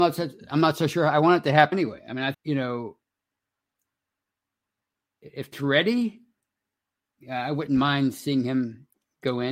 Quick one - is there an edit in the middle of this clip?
yes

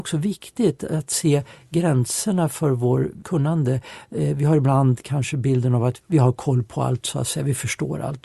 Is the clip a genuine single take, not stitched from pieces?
no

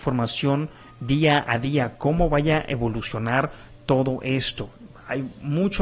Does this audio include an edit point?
no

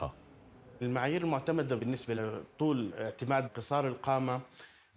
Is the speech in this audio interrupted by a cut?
no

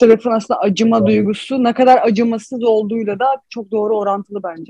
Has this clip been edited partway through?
no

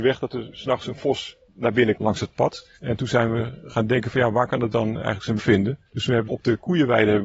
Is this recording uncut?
no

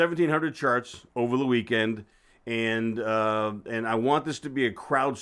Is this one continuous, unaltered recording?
yes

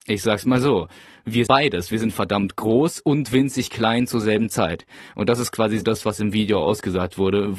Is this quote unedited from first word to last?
no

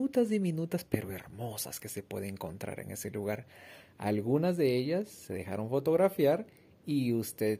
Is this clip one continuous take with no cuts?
yes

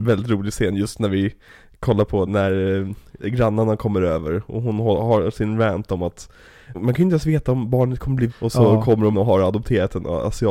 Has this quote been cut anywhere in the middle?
yes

